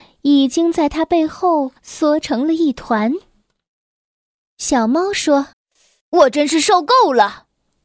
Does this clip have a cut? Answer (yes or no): yes